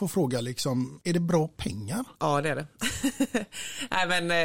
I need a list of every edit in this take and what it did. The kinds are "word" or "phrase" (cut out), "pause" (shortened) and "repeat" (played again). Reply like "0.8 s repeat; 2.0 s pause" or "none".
2.2 s pause